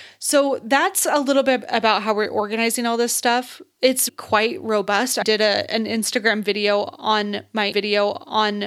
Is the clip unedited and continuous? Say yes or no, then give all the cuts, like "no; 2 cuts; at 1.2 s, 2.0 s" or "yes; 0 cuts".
no; 3 cuts; at 4.1 s, 5.2 s, 7.7 s